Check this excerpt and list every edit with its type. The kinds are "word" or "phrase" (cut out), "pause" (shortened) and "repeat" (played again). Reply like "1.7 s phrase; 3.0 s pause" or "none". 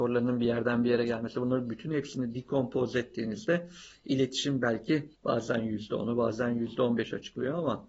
5.1 s pause

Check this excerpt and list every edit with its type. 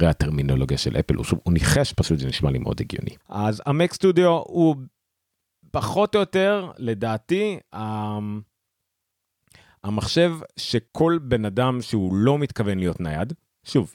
3.2 s pause; 10.9 s pause

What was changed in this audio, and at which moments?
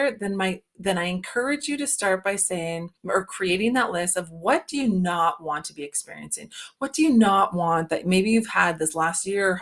3.0 s pause

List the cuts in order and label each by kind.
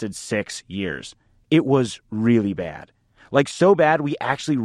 none

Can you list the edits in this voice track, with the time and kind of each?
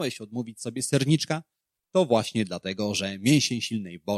none

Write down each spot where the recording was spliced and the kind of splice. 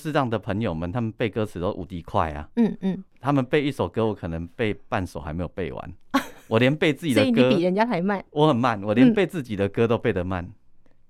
6.0 s pause

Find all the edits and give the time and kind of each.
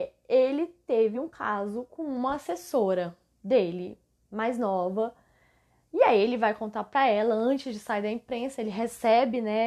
none

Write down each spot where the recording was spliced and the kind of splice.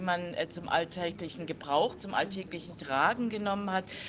none

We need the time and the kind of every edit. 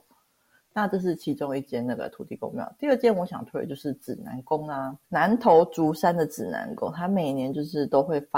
5.0 s pause

